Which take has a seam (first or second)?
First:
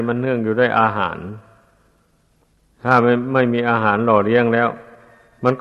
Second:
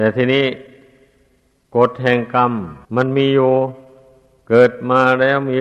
second